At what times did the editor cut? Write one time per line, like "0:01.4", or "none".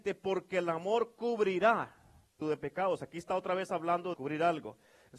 0:02.4
0:04.1